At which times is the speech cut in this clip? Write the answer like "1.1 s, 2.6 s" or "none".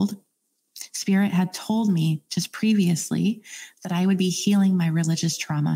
none